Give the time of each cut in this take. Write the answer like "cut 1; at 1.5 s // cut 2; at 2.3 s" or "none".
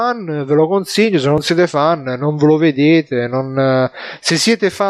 none